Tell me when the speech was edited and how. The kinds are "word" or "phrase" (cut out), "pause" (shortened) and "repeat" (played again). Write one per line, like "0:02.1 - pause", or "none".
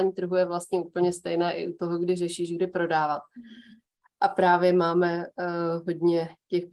none